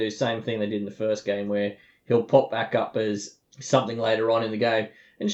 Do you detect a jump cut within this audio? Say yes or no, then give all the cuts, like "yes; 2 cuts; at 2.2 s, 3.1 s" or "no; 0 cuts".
no; 0 cuts